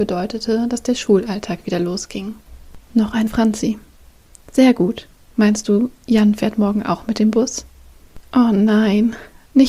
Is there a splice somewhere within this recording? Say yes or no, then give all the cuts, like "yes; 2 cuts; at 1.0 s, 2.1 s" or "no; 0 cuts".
yes; 1 cut; at 3.3 s